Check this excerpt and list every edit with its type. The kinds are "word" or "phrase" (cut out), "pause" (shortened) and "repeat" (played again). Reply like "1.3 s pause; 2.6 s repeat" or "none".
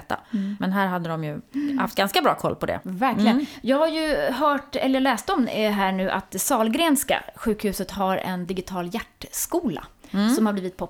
none